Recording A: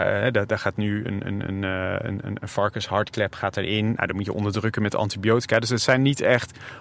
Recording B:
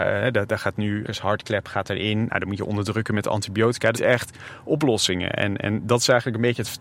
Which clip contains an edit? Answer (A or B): B